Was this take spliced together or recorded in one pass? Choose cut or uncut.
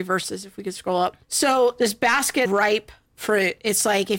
cut